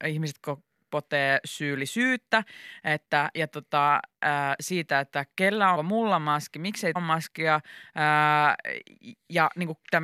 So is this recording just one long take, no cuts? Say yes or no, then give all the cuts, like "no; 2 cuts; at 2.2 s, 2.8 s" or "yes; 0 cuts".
no; 3 cuts; at 3.3 s, 5.7 s, 7.0 s